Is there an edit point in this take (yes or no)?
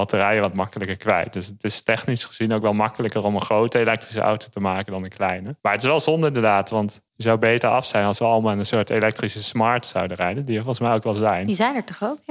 yes